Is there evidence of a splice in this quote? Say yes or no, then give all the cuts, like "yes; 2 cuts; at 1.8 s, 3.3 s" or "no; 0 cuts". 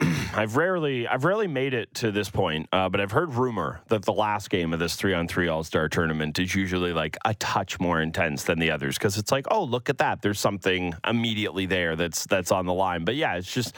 no; 0 cuts